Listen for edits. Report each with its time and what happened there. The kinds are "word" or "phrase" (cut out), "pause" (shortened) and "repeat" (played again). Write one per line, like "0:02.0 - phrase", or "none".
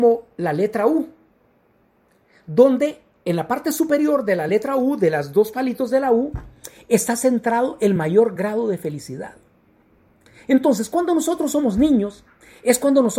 none